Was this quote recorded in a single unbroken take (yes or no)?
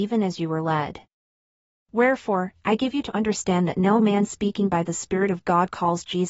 yes